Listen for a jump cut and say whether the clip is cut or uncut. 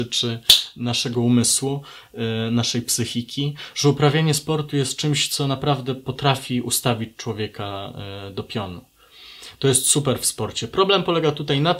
uncut